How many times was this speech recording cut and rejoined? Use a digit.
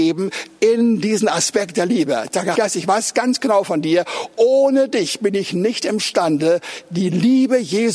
1